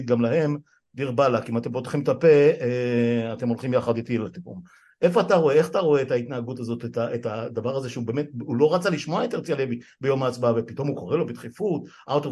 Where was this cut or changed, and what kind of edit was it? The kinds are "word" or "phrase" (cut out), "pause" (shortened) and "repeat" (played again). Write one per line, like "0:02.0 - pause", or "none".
none